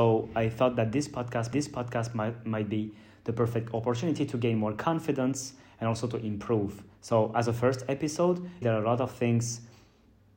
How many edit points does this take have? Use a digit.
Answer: 3